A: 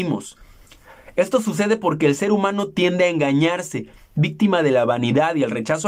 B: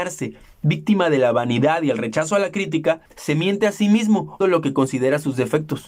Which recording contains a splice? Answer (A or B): B